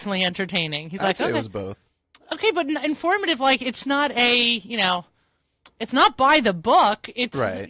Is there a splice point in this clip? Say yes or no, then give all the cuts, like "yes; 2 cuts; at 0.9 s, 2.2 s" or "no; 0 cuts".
no; 0 cuts